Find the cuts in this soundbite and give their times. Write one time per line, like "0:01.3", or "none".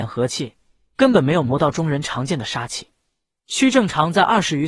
none